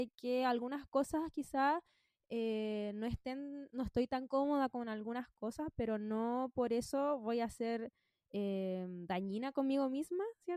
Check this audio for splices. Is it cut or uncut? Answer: uncut